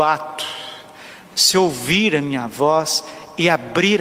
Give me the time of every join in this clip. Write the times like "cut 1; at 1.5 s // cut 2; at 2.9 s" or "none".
none